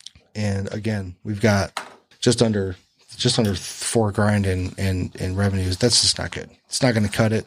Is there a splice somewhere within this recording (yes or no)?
yes